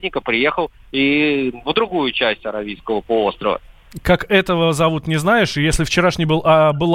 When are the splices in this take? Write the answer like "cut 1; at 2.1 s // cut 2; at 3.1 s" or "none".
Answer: none